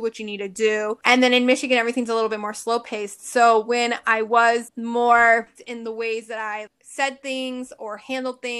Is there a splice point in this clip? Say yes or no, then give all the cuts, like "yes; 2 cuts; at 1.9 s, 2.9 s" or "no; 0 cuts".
yes; 2 cuts; at 5.6 s, 6.7 s